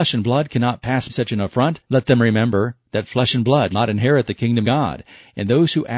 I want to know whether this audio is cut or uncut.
cut